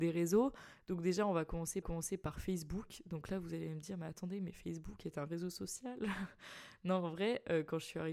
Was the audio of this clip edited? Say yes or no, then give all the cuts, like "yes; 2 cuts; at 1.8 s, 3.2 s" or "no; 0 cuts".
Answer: yes; 1 cut; at 1.8 s